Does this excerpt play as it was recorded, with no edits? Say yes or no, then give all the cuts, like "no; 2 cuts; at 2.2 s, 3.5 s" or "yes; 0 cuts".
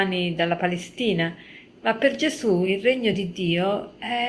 yes; 0 cuts